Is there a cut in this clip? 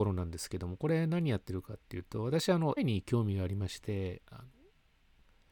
yes; 1 cut; at 2.8 s

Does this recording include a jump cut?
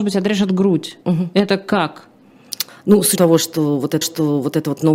yes; 4 cuts; at 1.0 s, 2.7 s, 3.2 s, 4.0 s

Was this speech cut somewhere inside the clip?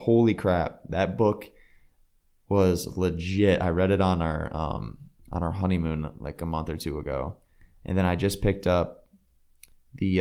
no; 0 cuts

